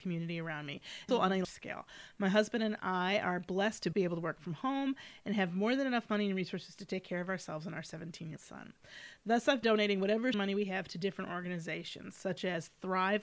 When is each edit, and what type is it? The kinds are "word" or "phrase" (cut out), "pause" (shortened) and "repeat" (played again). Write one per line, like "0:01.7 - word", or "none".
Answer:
0:01.1 - word
0:01.4 - word
0:03.9 - word
0:08.4 - word
0:09.6 - word
0:10.3 - word